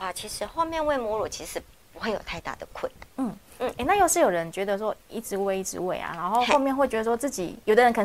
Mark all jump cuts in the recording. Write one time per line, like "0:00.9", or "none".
none